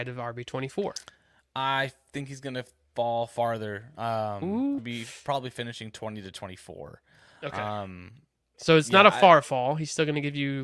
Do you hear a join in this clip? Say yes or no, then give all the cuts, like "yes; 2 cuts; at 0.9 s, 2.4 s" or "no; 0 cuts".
yes; 1 cut; at 4.8 s